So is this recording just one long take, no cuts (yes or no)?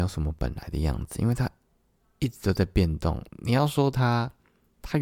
no